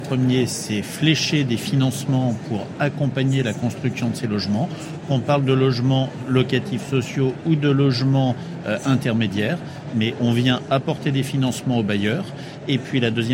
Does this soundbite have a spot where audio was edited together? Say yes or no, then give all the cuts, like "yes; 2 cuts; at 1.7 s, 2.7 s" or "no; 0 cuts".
no; 0 cuts